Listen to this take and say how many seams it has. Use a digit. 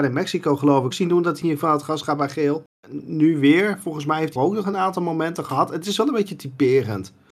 3